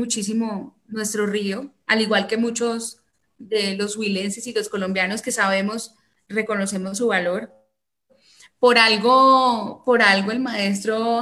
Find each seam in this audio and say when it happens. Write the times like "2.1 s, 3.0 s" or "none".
none